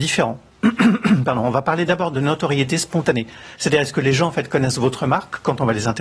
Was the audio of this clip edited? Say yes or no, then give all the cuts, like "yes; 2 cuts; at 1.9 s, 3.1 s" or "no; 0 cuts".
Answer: no; 0 cuts